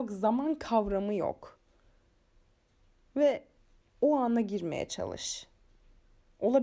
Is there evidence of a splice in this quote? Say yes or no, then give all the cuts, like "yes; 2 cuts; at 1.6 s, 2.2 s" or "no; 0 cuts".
no; 0 cuts